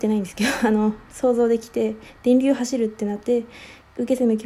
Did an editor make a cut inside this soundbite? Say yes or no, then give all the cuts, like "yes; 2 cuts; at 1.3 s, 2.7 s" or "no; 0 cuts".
no; 0 cuts